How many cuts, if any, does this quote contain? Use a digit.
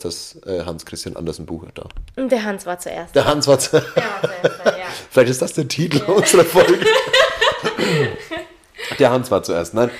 0